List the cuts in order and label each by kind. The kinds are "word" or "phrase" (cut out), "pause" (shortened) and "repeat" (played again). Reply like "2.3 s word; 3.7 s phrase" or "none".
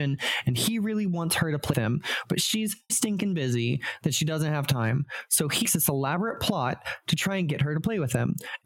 1.7 s word; 2.9 s word; 5.6 s word